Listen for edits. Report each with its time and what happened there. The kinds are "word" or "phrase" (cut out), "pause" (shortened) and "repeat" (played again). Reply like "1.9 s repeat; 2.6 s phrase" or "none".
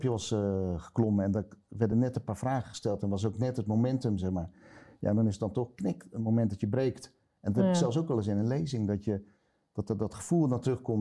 none